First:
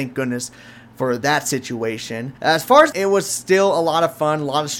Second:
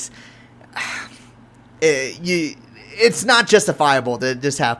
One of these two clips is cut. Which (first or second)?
first